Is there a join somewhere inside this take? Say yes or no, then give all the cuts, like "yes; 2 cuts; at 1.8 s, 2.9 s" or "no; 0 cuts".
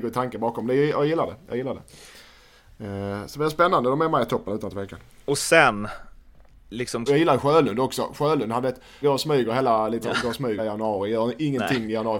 yes; 4 cuts; at 7.1 s, 9.0 s, 10.0 s, 10.6 s